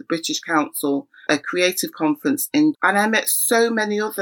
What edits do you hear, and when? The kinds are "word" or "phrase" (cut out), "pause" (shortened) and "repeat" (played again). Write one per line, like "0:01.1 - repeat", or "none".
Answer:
0:01.3 - word
0:02.7 - word